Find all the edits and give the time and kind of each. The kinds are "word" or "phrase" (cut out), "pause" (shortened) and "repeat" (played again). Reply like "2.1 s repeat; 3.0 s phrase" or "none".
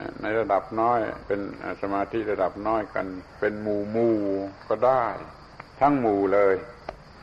3.3 s pause